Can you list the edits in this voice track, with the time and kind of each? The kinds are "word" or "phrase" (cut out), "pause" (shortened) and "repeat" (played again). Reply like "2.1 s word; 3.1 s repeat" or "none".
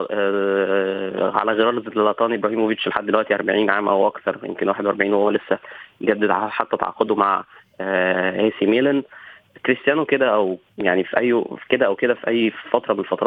none

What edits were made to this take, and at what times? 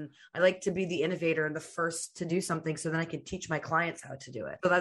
none

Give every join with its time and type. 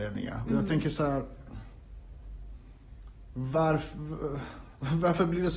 none

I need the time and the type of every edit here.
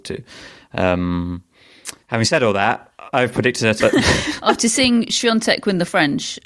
3.8 s word

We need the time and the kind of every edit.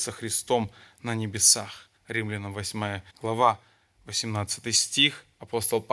2.0 s pause; 3.1 s pause

